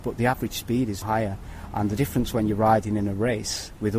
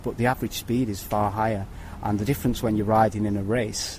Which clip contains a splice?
first; 1 cut; at 1.0 s

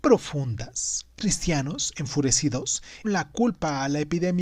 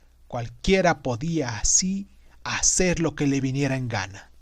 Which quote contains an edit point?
first; 2 cuts; at 1.2 s, 3.0 s

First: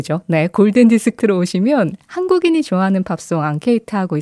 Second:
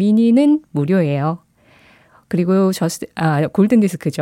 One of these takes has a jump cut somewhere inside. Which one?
first; 1 cut; at 1.2 s

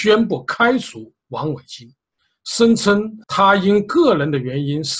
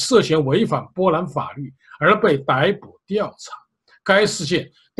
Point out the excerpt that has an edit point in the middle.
first; 1 cut; at 3.2 s

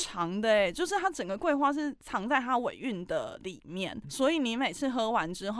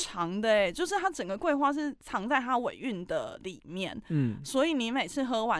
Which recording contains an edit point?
first; 1 cut; at 4.0 s

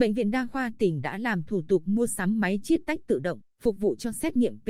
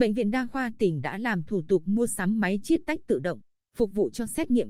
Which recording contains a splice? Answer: first; 1 cut; at 3.5 s

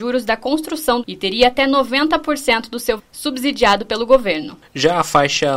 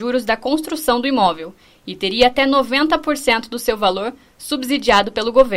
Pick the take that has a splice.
first; 2 cuts; at 1.0 s, 3.0 s

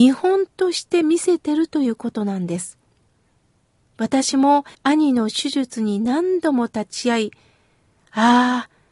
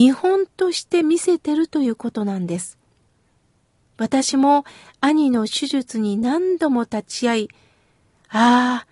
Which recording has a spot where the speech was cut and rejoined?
first; 1 cut; at 4.7 s

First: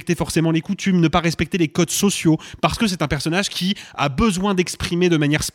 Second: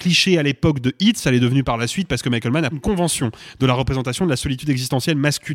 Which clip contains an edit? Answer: second; 1 cut; at 2.7 s

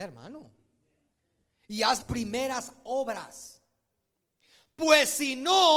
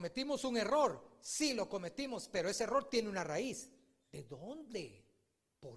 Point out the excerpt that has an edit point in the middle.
first; 1 cut; at 2.0 s

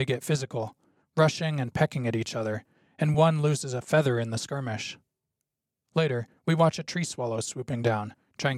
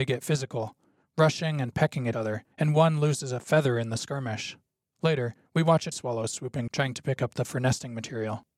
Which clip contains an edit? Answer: second; 6 cuts; at 2.1 s, 2.5 s, 4.8 s, 5.9 s, 6.7 s, 7.4 s

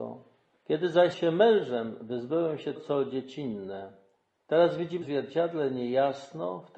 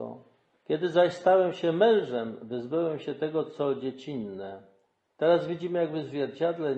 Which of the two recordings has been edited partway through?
first; 3 cuts; at 1.1 s, 2.7 s, 5.0 s

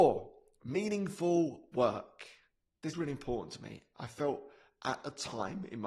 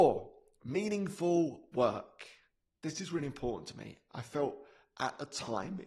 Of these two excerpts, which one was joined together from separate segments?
first; 1 cut; at 2.9 s

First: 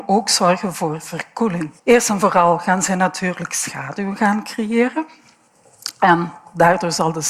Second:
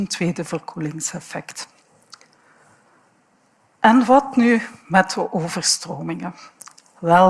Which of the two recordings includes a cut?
first; 1 cut; at 1.8 s

